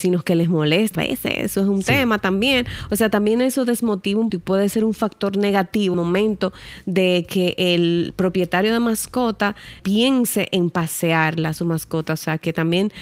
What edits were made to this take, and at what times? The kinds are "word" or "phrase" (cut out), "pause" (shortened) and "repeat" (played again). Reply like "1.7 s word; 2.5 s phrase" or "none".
0.9 s word; 4.3 s word; 5.9 s word; 9.8 s word